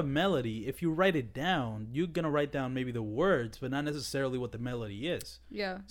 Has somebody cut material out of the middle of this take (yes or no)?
no